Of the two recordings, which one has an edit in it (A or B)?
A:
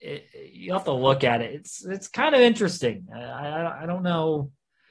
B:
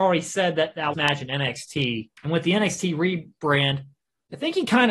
B